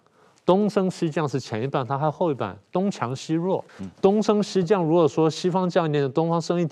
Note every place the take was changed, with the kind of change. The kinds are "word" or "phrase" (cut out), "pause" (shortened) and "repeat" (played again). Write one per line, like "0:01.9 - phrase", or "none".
0:03.7 - pause